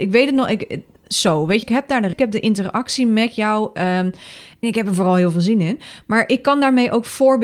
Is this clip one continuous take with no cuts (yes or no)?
no